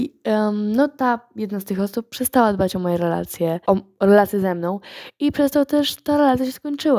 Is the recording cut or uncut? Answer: cut